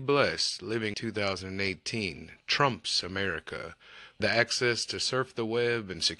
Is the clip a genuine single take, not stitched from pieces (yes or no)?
no